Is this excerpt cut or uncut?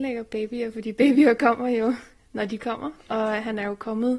uncut